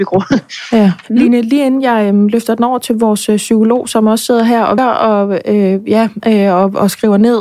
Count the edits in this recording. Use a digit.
2